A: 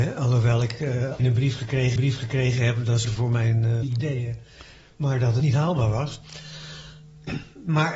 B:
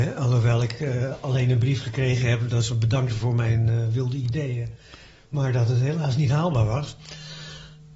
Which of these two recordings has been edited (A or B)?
A